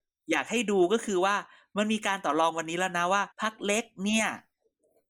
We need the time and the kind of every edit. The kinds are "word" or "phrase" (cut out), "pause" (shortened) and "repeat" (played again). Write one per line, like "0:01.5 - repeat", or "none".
0:03.3 - pause